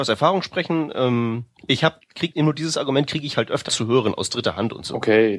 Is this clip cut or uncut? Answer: cut